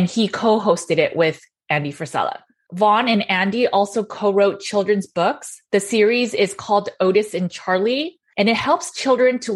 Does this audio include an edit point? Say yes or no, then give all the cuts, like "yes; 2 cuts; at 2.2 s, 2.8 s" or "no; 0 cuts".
no; 0 cuts